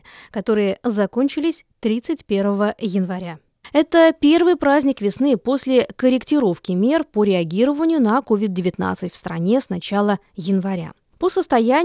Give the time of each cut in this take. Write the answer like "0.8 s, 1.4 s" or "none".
none

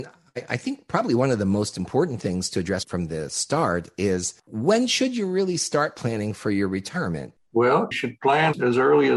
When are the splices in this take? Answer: 7.9 s

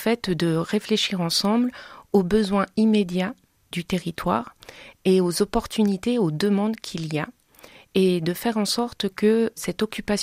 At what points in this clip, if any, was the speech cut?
none

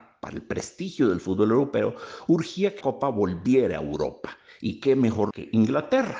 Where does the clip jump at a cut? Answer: 2.8 s, 5.3 s

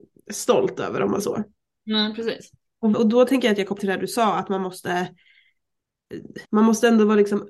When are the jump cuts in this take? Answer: 1.2 s, 2.9 s, 3.8 s, 6.4 s

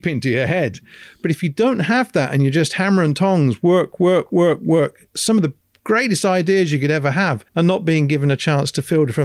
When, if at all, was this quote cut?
7.5 s

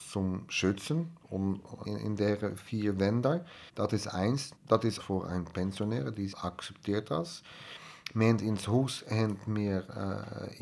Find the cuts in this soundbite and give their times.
1.8 s, 3.7 s, 4.6 s, 5.0 s, 6.3 s

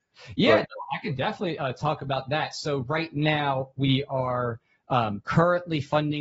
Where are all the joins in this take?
none

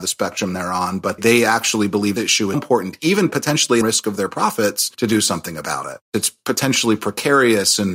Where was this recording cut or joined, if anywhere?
1.2 s, 2.2 s, 2.5 s, 3.8 s, 4.9 s

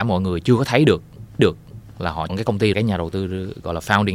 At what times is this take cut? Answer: 1.4 s, 2.3 s, 2.7 s

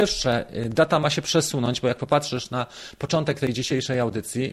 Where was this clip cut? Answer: none

